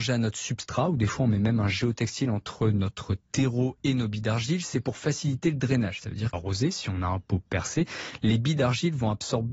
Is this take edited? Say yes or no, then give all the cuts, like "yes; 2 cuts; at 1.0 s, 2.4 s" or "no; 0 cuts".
yes; 1 cut; at 6.3 s